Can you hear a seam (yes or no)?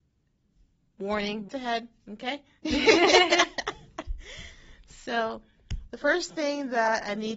yes